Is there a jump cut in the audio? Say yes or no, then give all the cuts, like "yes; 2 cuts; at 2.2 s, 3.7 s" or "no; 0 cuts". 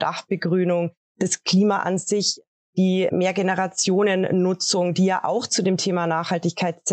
no; 0 cuts